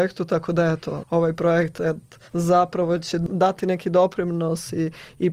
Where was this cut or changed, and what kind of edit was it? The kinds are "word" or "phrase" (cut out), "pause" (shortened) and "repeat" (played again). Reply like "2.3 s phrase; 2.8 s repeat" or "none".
1.0 s word; 2.3 s pause